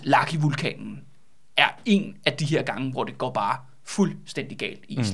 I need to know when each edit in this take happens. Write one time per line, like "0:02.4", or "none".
none